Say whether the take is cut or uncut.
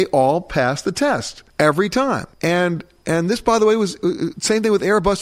cut